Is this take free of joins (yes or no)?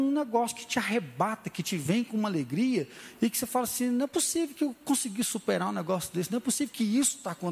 yes